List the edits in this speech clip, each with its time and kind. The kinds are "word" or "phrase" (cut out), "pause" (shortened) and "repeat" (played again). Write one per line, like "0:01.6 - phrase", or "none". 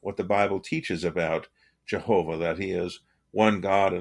none